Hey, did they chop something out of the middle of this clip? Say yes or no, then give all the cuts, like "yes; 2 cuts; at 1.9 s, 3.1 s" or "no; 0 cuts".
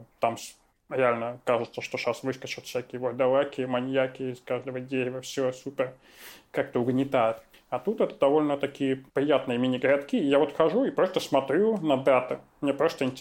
yes; 2 cuts; at 7.5 s, 9.1 s